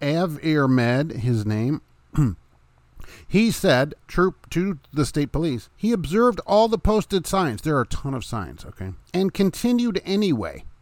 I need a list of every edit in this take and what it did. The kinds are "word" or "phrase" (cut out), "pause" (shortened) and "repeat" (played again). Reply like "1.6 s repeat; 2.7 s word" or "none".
2.4 s pause; 4.0 s pause; 5.7 s pause; 9.0 s pause